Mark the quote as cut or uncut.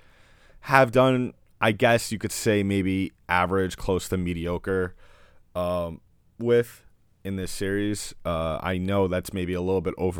uncut